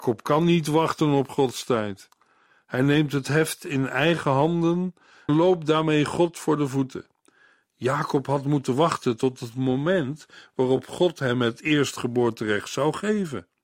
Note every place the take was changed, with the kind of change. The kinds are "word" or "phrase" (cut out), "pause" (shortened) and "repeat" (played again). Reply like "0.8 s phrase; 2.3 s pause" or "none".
5.3 s word